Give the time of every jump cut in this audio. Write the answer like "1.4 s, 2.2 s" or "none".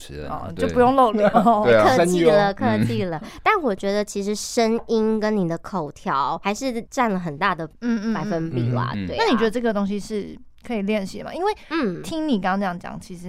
1.3 s